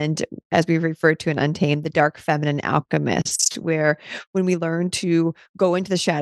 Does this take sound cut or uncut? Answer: uncut